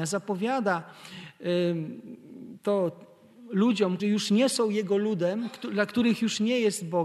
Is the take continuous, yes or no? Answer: no